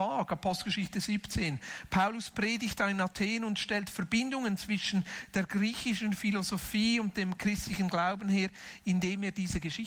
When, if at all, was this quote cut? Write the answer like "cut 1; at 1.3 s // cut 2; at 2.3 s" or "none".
none